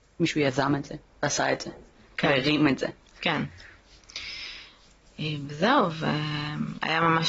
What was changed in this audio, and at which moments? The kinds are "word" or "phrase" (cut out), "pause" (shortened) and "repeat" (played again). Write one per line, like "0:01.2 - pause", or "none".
none